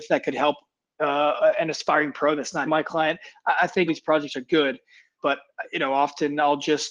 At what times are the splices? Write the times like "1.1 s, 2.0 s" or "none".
2.7 s, 3.9 s, 5.2 s